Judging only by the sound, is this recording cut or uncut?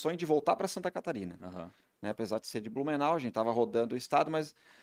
uncut